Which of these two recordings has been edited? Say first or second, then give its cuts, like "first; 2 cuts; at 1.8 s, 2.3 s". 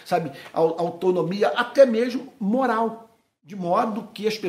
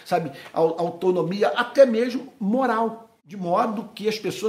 second; 1 cut; at 3.2 s